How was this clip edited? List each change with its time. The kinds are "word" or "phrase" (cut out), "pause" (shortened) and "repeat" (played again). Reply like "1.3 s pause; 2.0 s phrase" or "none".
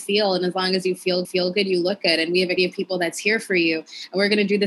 1.2 s repeat; 2.6 s word

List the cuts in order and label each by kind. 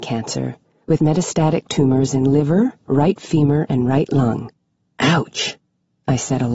1.0 s word; 4.8 s pause

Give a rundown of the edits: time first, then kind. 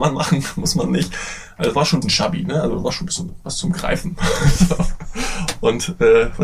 2.0 s word

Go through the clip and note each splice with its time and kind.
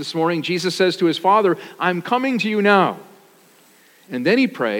none

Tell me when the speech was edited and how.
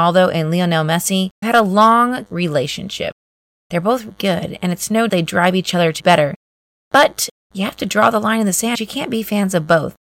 1.4 s word; 2.3 s word; 4.1 s word; 5.1 s word; 6.0 s word; 8.7 s word

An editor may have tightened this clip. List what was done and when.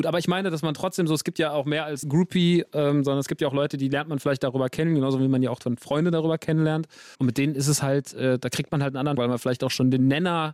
2.0 s word; 7.1 s pause; 9.2 s phrase

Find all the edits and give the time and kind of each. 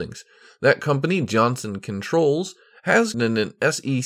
3.1 s word

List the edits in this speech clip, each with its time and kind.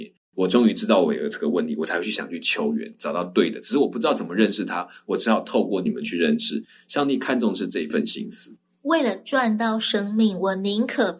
none

